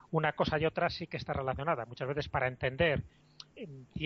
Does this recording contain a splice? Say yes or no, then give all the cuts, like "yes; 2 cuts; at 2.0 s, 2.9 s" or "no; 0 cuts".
no; 0 cuts